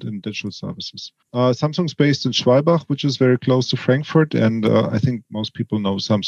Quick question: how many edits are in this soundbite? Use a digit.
1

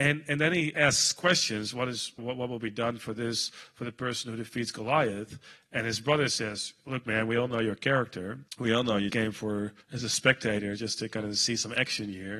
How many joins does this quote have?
4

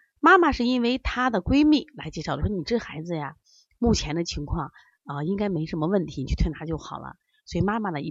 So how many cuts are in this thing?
0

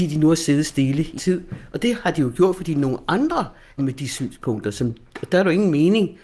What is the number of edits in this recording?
2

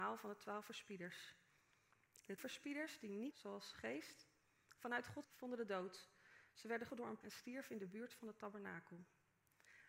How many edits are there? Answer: 6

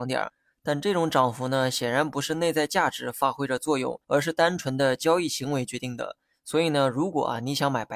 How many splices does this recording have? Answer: 1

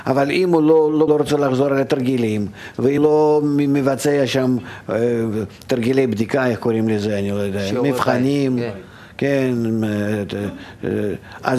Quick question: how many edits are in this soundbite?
3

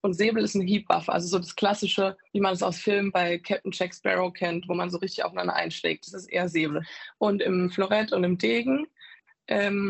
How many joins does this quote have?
1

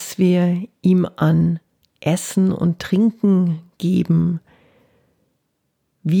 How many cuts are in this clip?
0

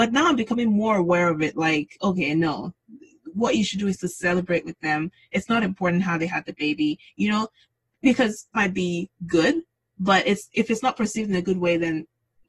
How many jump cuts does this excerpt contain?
1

